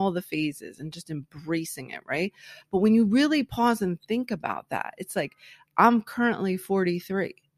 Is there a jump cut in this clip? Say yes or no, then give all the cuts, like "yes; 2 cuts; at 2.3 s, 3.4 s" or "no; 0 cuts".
no; 0 cuts